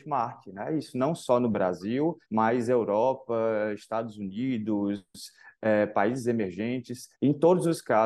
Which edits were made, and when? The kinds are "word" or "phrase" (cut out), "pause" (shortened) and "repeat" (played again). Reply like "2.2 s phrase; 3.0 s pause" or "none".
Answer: 2.2 s pause; 7.1 s pause